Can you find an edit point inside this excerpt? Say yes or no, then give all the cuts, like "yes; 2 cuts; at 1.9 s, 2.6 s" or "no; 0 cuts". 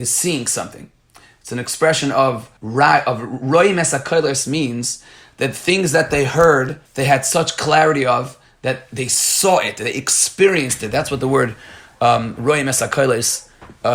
yes; 2 cuts; at 2.6 s, 6.8 s